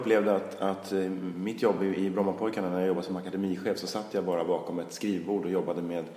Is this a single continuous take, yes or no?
yes